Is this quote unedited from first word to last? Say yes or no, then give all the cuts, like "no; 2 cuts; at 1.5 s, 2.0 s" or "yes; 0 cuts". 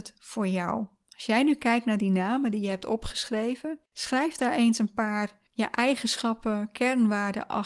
no; 2 cuts; at 3.9 s, 5.5 s